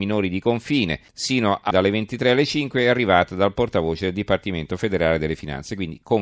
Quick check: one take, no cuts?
no; 2 cuts; at 1.1 s, 1.7 s

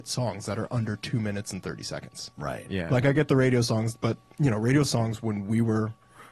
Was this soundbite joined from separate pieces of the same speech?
no; 0 cuts

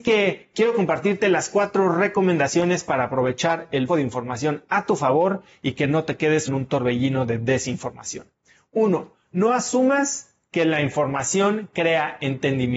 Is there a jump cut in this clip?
yes; 2 cuts; at 3.9 s, 6.5 s

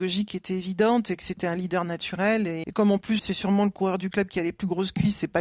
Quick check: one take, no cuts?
no; 2 cuts; at 2.6 s, 3.2 s

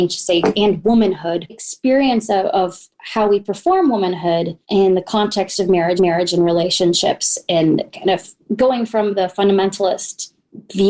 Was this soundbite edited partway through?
yes; 3 cuts; at 1.5 s, 4.6 s, 6.0 s

